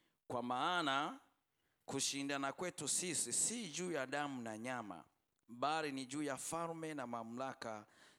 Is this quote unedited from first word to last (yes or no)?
yes